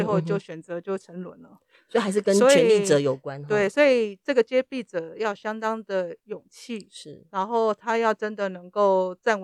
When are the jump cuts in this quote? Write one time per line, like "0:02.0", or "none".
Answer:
none